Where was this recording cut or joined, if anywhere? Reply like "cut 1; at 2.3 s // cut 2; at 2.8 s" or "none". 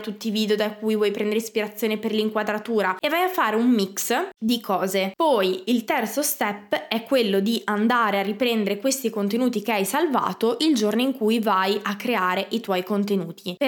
none